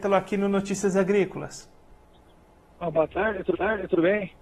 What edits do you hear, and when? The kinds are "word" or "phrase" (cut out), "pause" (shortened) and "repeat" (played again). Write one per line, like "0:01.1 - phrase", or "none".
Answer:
0:03.5 - repeat

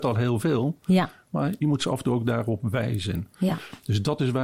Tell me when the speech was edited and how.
none

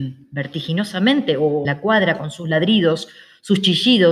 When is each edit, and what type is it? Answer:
0:01.6 - word

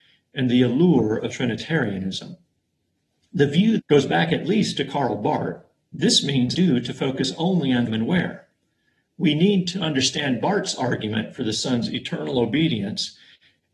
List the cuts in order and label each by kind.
0:01.3 - word
0:03.8 - phrase
0:05.8 - pause
0:06.5 - phrase
0:07.9 - phrase

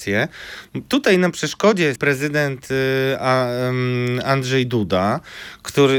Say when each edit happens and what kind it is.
0:02.0 - word

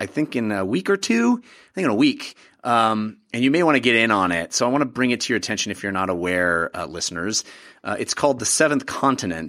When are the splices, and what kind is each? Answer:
none

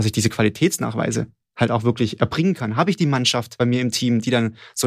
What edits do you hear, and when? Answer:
none

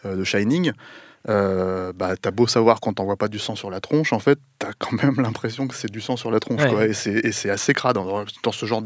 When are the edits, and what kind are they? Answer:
none

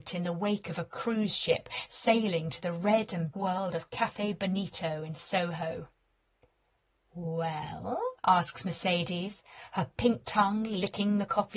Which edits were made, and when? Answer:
0:03.3 - word
0:08.2 - pause
0:10.2 - word

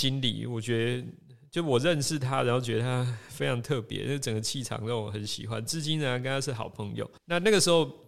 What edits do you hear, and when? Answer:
0:07.2 - pause

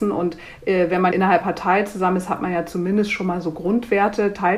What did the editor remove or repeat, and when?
0:01.1 - word
0:01.4 - word

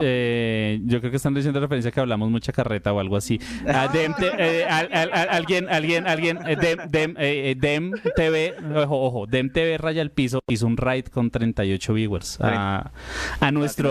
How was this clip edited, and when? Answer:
none

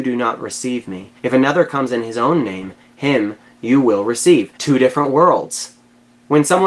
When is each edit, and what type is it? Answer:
0:01.2 - pause
0:04.6 - pause

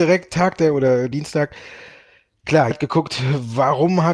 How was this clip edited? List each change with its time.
0:01.1 - phrase
0:02.7 - word

